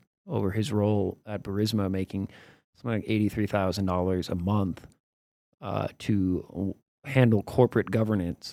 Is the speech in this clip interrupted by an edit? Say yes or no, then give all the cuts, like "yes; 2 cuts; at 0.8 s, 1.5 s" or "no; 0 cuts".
no; 0 cuts